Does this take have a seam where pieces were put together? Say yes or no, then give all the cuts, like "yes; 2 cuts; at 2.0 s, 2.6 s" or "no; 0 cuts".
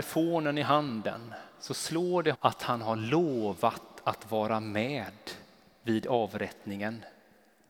yes; 1 cut; at 2.3 s